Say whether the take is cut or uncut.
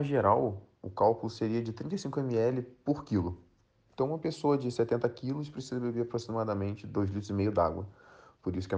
uncut